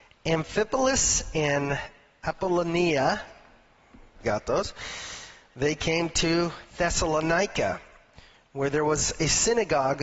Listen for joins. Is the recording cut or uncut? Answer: cut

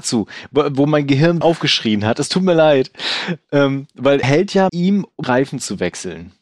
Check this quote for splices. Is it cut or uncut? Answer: cut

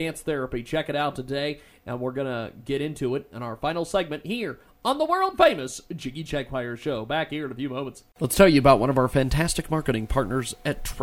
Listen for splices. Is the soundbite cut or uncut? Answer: cut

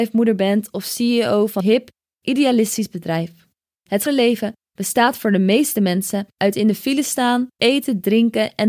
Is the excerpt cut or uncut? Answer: cut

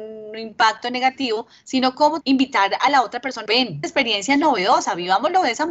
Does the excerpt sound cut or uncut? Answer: cut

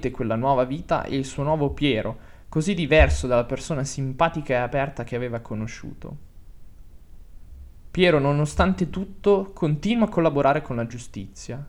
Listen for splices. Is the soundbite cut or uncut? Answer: uncut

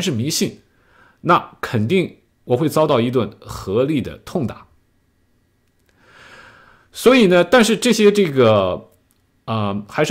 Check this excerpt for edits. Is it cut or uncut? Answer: uncut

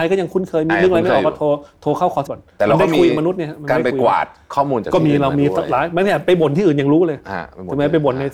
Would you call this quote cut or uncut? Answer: cut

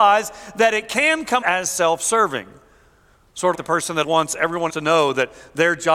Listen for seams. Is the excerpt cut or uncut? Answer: cut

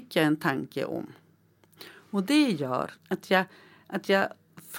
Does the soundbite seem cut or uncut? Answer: cut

